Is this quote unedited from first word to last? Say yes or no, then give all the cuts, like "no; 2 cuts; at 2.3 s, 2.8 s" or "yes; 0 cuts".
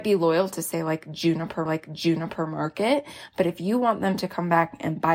no; 1 cut; at 1.7 s